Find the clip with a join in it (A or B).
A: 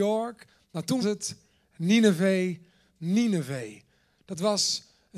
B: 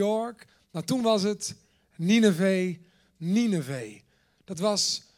A